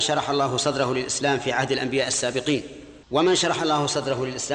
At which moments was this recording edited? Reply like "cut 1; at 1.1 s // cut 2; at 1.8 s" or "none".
cut 1; at 3.0 s